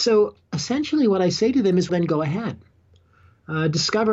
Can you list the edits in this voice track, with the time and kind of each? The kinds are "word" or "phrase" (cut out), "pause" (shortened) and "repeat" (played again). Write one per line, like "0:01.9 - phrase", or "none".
0:01.9 - word